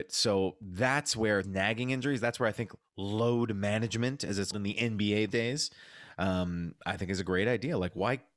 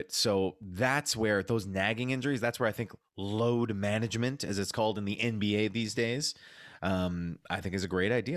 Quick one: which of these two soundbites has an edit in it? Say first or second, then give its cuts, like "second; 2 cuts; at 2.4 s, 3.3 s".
first; 3 cuts; at 1.4 s, 4.5 s, 5.3 s